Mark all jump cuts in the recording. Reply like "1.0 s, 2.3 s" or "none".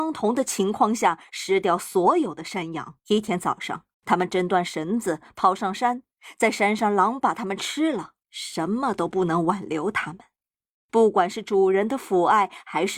3.0 s, 3.9 s, 8.2 s